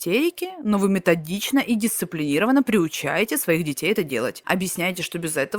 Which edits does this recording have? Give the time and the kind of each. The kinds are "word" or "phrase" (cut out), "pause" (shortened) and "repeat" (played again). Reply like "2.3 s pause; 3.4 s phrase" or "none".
none